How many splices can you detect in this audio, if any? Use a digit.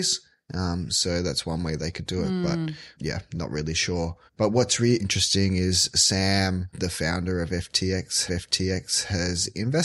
6